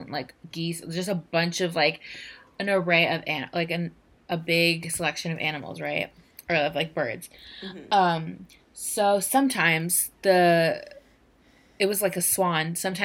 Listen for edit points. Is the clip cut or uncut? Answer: uncut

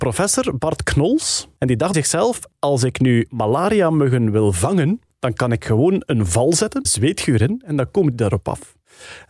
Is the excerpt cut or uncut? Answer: cut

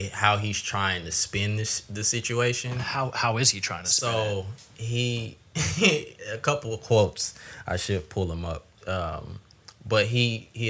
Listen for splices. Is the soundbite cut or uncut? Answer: cut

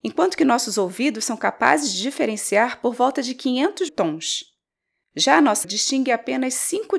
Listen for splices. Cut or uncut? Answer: cut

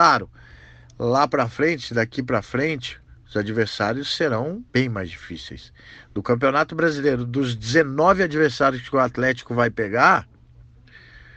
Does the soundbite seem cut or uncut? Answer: cut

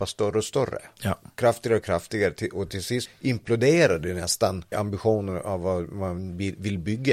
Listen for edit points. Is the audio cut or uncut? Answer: cut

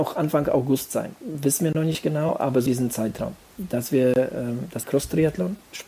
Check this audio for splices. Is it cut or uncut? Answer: cut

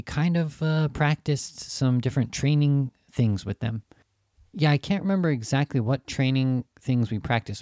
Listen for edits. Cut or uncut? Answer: uncut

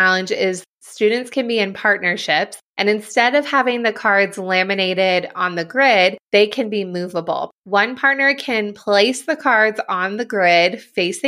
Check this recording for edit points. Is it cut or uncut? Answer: cut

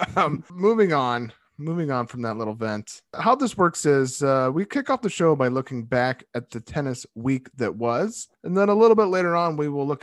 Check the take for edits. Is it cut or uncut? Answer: uncut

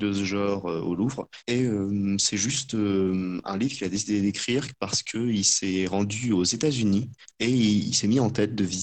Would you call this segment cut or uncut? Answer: uncut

